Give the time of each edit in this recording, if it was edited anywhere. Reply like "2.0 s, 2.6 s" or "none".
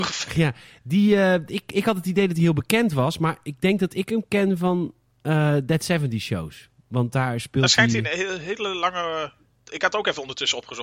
none